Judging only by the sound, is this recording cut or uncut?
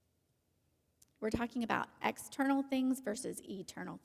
uncut